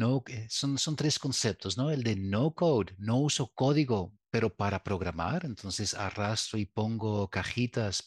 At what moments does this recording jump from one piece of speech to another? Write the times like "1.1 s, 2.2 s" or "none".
none